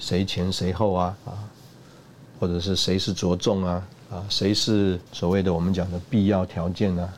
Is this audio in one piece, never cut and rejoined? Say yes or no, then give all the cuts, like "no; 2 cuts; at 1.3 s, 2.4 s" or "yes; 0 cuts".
no; 2 cuts; at 1.2 s, 5.1 s